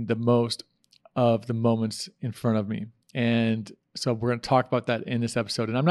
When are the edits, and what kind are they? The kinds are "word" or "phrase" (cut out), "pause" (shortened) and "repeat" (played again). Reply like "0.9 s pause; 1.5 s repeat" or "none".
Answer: none